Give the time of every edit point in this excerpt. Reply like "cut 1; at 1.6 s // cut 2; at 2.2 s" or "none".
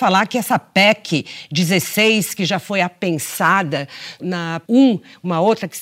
cut 1; at 4.2 s // cut 2; at 4.6 s